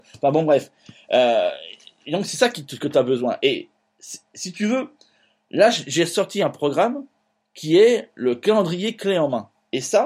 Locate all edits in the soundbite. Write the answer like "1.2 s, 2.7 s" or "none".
none